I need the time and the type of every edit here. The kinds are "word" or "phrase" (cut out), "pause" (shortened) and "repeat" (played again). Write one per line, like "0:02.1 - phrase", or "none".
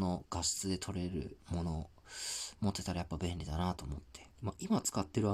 0:01.4 - pause
0:04.3 - pause

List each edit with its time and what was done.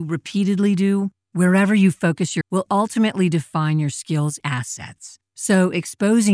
0:02.4 - word
0:04.4 - word

